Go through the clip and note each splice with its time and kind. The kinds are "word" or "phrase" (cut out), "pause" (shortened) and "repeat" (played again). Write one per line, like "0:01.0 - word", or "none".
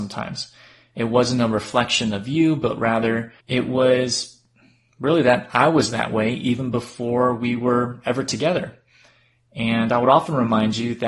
0:03.4 - pause